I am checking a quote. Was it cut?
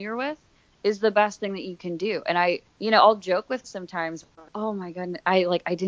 yes; 3 cuts; at 2.7 s, 3.6 s, 4.5 s

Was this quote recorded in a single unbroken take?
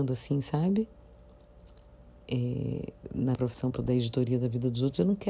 no; 2 cuts; at 3.3 s, 3.7 s

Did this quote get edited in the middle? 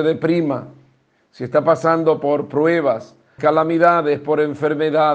yes; 1 cut; at 3.4 s

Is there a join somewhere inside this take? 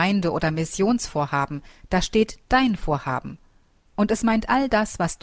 no; 0 cuts

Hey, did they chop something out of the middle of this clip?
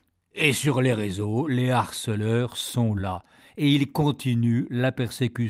no; 0 cuts

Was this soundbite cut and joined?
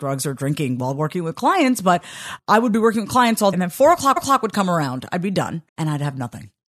yes; 4 cuts; at 2.4 s, 3.5 s, 4.2 s, 5.7 s

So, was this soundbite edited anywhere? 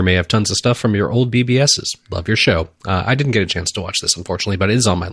no; 0 cuts

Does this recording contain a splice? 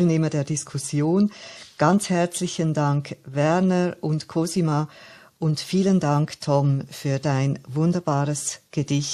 no; 0 cuts

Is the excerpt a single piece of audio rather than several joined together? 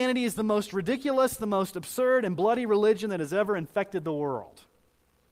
yes; 0 cuts

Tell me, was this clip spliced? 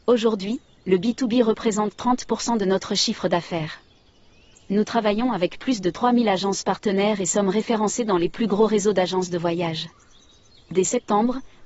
no; 0 cuts

